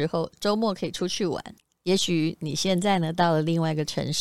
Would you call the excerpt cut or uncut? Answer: cut